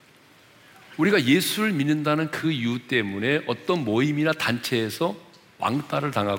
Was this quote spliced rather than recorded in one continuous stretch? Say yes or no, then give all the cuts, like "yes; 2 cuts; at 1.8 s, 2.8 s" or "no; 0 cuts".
no; 0 cuts